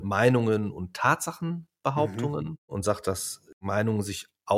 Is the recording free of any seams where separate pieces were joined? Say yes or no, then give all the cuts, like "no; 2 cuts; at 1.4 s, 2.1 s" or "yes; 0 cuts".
yes; 0 cuts